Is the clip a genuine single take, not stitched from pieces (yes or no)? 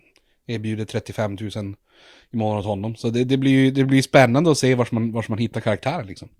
yes